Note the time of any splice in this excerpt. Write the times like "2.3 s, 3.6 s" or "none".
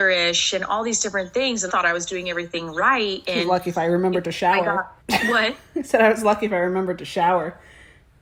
1.7 s, 5.0 s